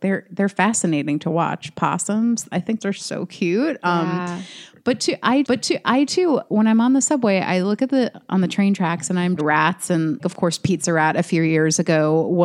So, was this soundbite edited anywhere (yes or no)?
yes